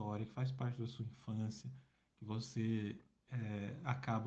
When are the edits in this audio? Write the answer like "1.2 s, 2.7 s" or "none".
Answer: none